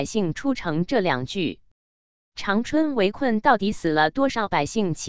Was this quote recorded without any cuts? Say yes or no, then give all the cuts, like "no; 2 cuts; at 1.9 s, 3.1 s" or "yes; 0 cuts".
yes; 0 cuts